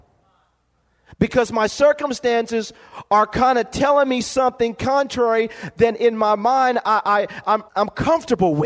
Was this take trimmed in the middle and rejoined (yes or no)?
yes